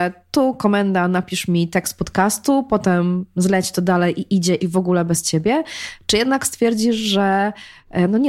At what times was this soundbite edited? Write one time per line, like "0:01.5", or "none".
0:04.6